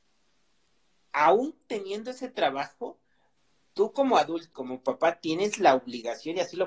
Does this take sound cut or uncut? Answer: cut